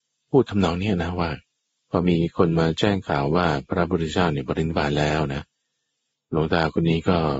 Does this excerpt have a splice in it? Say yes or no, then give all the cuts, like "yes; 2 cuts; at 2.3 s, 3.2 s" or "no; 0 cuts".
yes; 1 cut; at 1.5 s